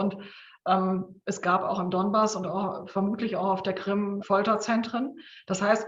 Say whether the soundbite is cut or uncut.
cut